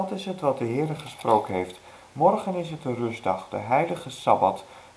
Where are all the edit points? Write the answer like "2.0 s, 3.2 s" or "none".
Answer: none